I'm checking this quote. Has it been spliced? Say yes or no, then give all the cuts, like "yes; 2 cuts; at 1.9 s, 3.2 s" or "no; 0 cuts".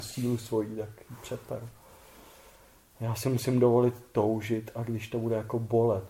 no; 0 cuts